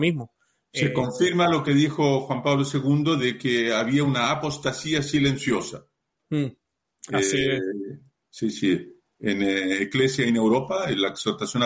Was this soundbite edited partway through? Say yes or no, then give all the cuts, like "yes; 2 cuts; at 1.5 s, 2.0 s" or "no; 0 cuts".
no; 0 cuts